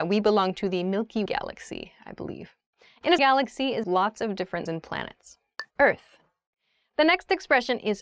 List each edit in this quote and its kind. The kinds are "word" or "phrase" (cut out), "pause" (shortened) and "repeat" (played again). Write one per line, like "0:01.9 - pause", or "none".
0:01.3 - word
0:03.2 - phrase
0:03.8 - phrase
0:04.7 - word